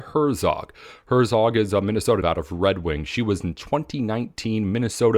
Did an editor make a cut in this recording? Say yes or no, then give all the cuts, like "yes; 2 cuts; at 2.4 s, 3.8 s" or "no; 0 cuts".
yes; 1 cut; at 2.2 s